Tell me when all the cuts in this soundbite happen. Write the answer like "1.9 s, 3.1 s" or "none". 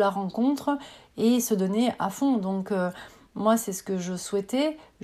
none